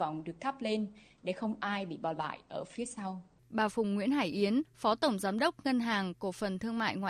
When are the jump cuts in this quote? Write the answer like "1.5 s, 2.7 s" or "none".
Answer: 3.4 s